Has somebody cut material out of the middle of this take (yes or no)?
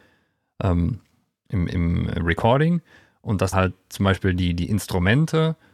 yes